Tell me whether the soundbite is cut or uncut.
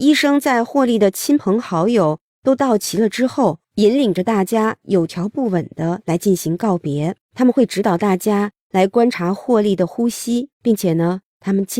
cut